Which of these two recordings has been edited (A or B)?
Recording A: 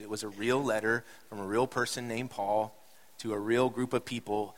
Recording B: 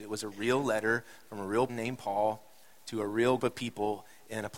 B